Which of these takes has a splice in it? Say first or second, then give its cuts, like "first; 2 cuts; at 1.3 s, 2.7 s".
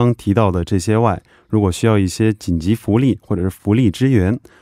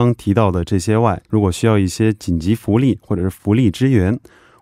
second; 1 cut; at 1.3 s